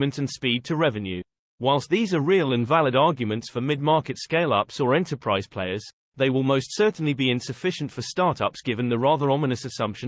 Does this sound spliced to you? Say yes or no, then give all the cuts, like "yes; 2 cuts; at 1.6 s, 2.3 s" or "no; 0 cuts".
no; 0 cuts